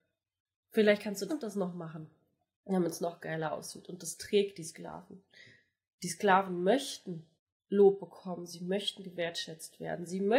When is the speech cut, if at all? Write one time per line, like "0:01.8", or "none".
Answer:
0:01.3
0:07.4